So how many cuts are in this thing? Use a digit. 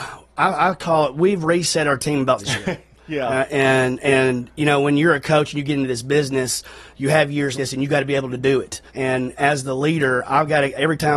3